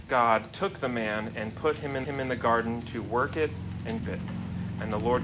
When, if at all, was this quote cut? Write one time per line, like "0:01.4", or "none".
0:02.0
0:04.0